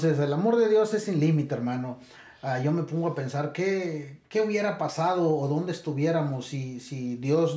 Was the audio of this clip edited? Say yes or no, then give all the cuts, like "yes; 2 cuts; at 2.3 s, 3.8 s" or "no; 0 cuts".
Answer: no; 0 cuts